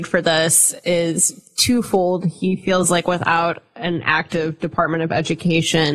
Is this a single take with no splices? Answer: yes; 0 cuts

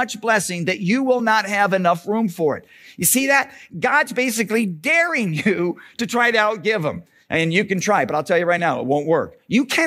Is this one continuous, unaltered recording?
yes; 0 cuts

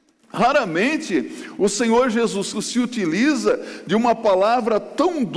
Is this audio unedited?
no; 1 cut; at 2.5 s

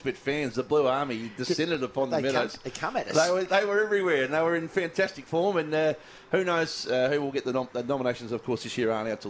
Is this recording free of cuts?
yes; 0 cuts

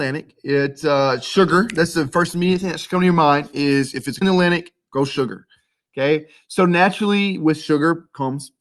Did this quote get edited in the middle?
yes; 1 cut; at 4.2 s

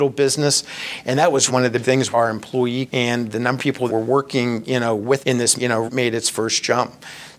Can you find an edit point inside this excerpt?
yes; 9 cuts; at 1.5 s, 1.8 s, 2.1 s, 2.9 s, 3.6 s, 3.9 s, 5.2 s, 5.6 s, 5.9 s

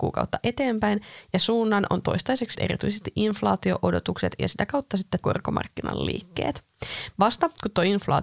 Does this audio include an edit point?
yes; 2 cuts; at 2.5 s, 5.2 s

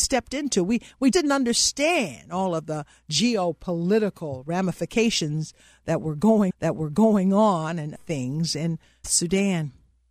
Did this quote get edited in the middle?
yes; 4 cuts; at 1.1 s, 6.5 s, 8.0 s, 9.0 s

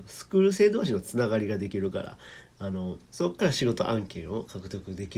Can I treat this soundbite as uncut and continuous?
no; 1 cut; at 3.1 s

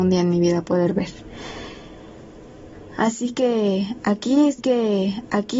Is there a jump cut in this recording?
yes; 1 cut; at 4.6 s

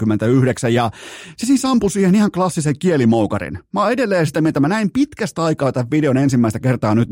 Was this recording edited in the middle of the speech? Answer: no; 0 cuts

